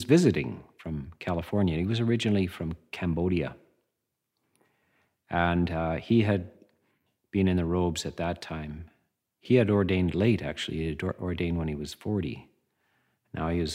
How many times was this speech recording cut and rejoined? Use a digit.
0